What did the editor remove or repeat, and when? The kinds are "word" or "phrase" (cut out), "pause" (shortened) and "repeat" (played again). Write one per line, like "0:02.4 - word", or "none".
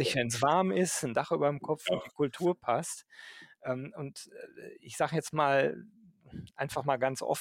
none